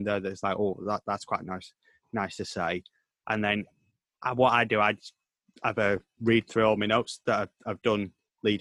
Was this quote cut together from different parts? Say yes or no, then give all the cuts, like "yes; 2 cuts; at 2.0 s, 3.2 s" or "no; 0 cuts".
no; 0 cuts